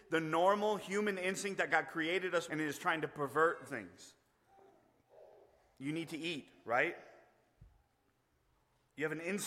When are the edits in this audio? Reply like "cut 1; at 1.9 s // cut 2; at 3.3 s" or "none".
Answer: cut 1; at 2.5 s // cut 2; at 3.7 s